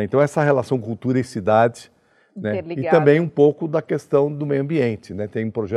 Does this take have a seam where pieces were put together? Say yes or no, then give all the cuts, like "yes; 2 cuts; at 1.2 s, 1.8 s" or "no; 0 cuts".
no; 0 cuts